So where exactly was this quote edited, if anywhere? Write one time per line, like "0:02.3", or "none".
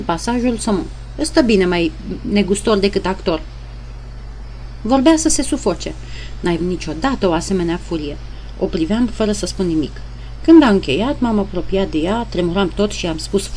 0:06.6

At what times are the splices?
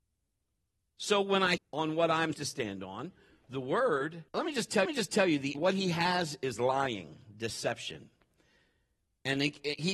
0:01.6
0:02.3
0:04.3
0:04.8
0:05.5

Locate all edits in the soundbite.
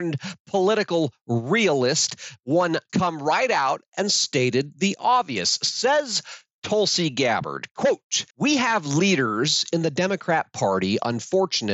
0:02.9
0:08.3

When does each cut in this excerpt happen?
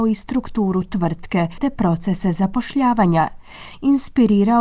none

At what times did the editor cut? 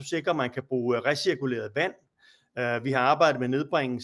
none

